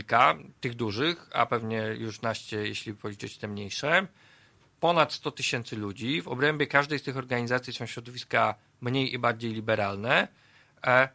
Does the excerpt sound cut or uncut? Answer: uncut